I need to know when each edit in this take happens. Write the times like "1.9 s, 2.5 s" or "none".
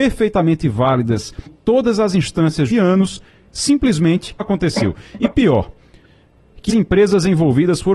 1.5 s, 2.7 s, 4.4 s, 6.7 s